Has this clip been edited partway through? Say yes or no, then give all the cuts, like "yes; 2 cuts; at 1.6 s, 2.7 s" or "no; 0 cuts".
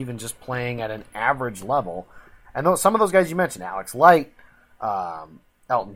no; 0 cuts